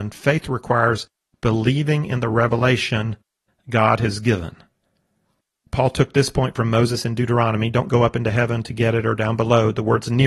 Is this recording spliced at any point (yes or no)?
no